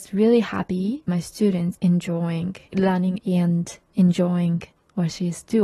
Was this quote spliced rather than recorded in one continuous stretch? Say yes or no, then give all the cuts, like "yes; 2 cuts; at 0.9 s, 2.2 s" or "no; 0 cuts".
yes; 3 cuts; at 1.1 s, 1.8 s, 3.2 s